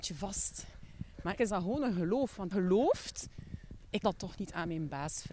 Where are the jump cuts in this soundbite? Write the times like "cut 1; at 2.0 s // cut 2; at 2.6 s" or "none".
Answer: cut 1; at 1.4 s // cut 2; at 2.5 s // cut 3; at 4.0 s